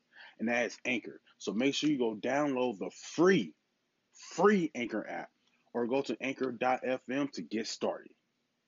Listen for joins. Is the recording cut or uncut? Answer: uncut